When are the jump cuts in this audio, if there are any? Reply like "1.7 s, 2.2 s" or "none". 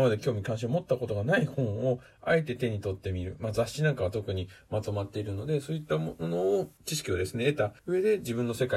6.8 s, 7.8 s